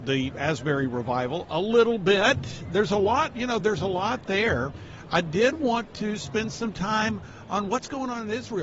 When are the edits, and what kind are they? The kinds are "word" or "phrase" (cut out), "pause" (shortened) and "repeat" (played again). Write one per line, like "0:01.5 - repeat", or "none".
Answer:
none

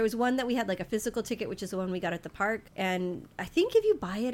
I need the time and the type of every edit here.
0:02.7 - pause

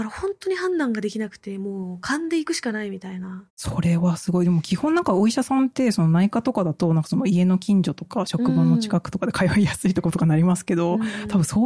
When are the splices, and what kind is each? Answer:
0:03.5 - pause

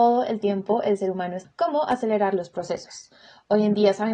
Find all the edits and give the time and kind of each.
0:01.4 - word

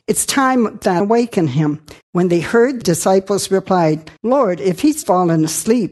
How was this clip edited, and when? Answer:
0:01.0 - phrase
0:02.0 - pause
0:02.8 - phrase
0:04.2 - pause
0:05.0 - word

